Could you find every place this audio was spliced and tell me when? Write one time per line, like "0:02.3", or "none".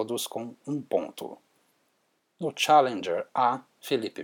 none